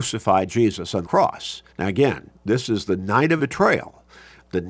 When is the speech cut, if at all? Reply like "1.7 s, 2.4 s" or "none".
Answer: 1.0 s, 1.7 s, 2.3 s, 3.4 s